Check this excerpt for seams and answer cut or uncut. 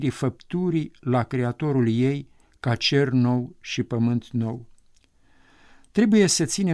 uncut